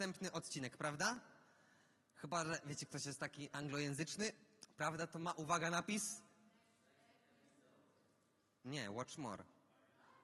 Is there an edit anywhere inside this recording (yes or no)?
no